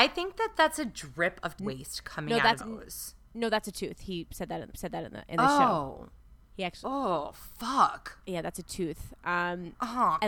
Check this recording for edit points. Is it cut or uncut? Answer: cut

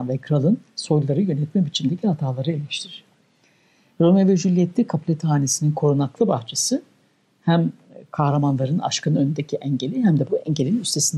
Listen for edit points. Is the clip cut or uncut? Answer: uncut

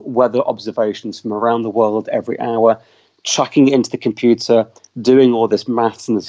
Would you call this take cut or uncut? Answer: uncut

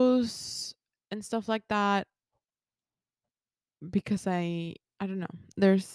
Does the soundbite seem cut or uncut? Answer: uncut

